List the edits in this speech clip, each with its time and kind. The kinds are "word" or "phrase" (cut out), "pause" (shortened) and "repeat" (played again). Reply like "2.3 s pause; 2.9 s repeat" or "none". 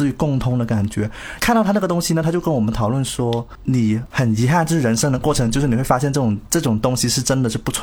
none